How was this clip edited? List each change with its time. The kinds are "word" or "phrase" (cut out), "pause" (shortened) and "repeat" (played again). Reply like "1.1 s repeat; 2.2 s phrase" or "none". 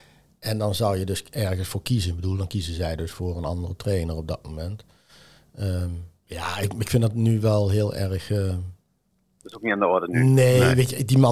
none